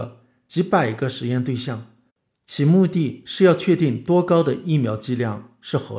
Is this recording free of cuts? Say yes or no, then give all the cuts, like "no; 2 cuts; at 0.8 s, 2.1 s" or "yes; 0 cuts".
yes; 0 cuts